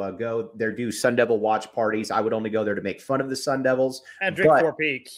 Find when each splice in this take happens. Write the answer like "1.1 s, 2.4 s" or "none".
none